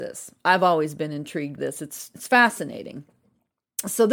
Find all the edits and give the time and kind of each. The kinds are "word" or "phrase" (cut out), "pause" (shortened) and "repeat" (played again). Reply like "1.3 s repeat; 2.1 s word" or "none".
1.6 s word

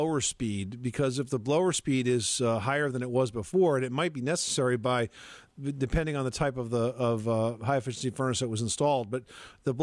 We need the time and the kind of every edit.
none

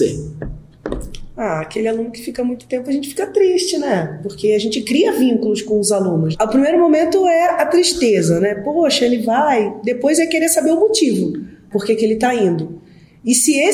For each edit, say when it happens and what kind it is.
none

